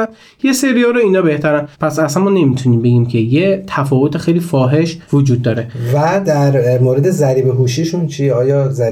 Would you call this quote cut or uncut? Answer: cut